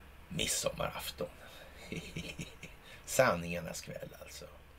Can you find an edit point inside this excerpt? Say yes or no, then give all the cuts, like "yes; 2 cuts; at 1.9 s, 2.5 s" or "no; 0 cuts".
no; 0 cuts